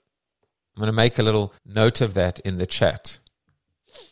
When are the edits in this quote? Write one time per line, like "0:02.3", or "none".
0:01.6